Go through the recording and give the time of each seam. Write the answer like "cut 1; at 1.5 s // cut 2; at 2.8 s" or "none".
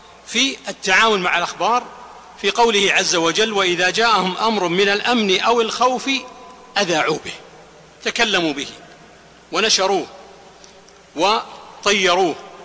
none